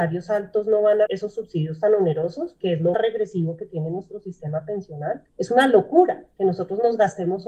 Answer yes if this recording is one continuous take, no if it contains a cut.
no